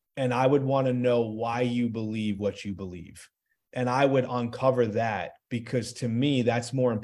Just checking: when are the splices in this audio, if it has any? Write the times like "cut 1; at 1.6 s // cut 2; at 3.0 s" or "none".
none

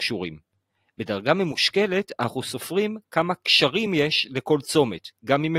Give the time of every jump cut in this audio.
none

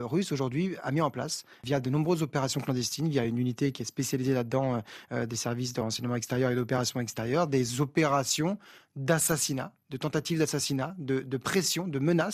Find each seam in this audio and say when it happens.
none

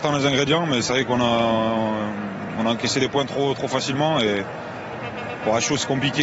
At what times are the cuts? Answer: none

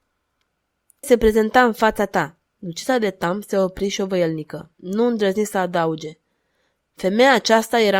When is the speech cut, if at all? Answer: cut 1; at 1.0 s // cut 2; at 2.5 s // cut 3; at 4.7 s

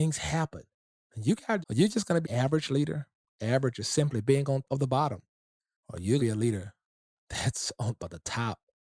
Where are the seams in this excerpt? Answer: cut 1; at 1.6 s // cut 2; at 2.2 s // cut 3; at 4.6 s // cut 4; at 6.2 s // cut 5; at 8.0 s

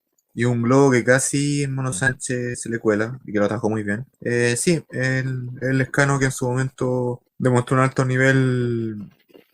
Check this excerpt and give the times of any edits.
cut 1; at 4.1 s // cut 2; at 7.3 s

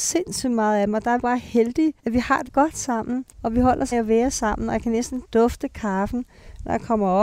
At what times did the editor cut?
cut 1; at 1.2 s // cut 2; at 2.0 s // cut 3; at 2.5 s // cut 4; at 3.3 s // cut 5; at 3.9 s

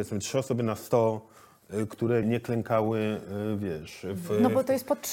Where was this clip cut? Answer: cut 1; at 2.2 s

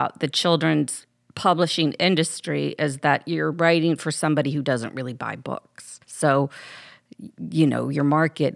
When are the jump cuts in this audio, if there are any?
cut 1; at 6.0 s

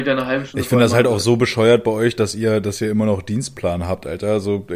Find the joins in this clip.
none

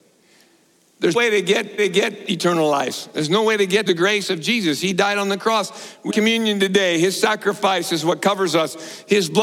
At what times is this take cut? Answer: cut 1; at 1.1 s // cut 2; at 1.8 s // cut 3; at 3.9 s // cut 4; at 6.1 s

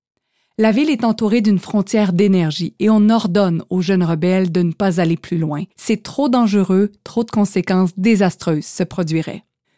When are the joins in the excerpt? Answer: cut 1; at 5.7 s

